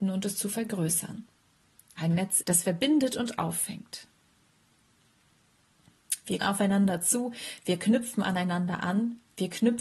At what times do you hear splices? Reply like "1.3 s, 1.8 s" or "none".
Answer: 2.4 s, 6.4 s